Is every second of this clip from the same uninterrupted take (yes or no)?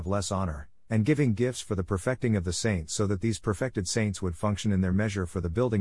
yes